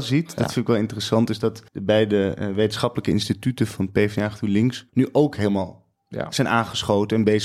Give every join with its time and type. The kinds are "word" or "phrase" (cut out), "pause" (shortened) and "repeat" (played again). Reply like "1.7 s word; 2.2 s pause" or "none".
1.7 s pause; 4.9 s pause